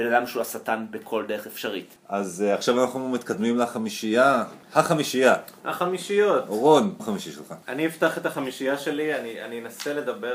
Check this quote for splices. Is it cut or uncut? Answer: cut